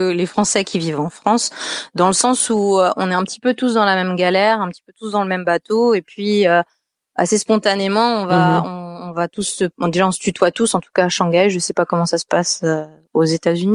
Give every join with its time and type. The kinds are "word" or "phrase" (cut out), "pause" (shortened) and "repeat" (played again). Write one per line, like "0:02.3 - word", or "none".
none